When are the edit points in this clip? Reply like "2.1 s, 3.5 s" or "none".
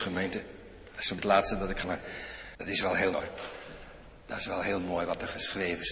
1.2 s, 1.8 s, 2.5 s, 3.1 s